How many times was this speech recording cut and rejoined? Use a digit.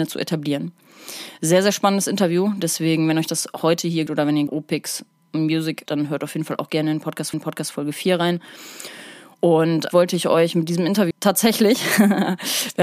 6